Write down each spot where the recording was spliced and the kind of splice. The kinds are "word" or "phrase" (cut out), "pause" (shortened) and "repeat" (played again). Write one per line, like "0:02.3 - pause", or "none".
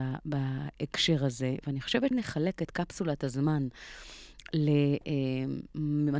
0:02.1 - word